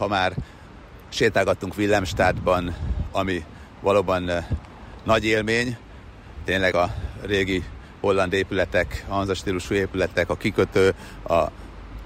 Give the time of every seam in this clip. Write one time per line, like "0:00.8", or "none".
0:06.7